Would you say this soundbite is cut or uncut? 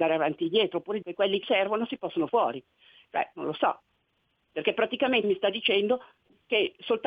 cut